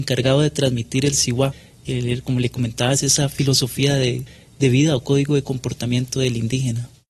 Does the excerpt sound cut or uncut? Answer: uncut